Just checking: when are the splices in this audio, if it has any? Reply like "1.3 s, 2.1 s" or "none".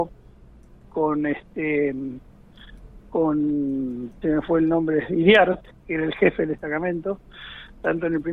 4.2 s